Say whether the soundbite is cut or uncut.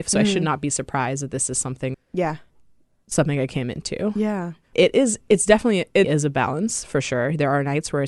cut